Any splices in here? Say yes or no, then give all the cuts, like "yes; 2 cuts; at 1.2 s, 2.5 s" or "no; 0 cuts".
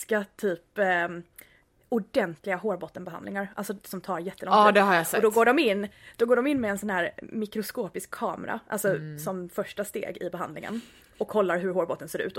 no; 0 cuts